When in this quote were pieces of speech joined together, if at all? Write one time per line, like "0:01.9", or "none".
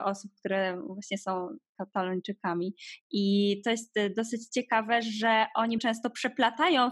0:05.8